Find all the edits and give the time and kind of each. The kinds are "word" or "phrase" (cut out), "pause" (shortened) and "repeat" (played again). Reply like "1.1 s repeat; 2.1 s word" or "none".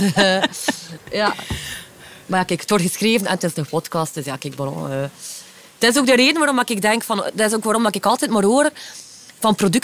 none